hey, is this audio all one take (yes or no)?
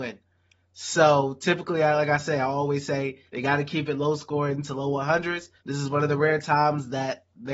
no